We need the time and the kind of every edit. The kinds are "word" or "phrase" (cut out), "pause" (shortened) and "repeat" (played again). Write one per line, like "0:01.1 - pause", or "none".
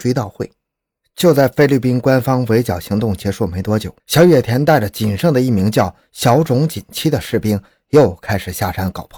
0:04.0 - pause